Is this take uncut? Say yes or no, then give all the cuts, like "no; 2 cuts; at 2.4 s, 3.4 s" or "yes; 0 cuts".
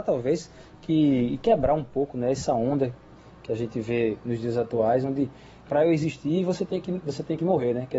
yes; 0 cuts